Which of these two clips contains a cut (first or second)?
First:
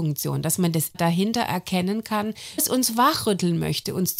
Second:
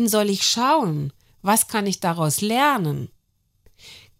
first